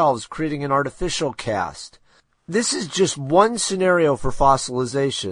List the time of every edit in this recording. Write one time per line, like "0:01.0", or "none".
none